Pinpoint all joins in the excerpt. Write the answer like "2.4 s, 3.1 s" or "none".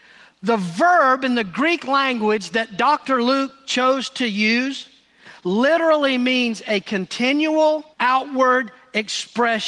7.9 s

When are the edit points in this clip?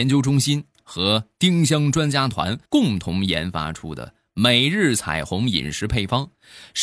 2.6 s

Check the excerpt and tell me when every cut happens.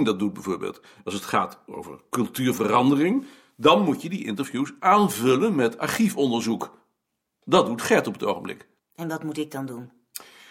8.8 s

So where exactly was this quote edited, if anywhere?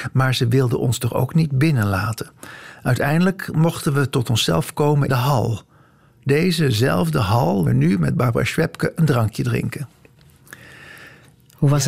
5.1 s, 7.7 s

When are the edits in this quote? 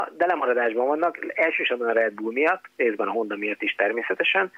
none

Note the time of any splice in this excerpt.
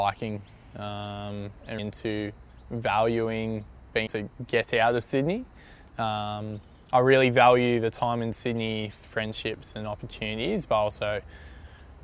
1.8 s, 4.1 s, 9.0 s

